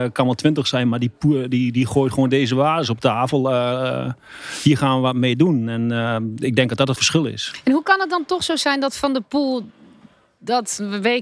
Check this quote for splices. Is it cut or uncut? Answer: cut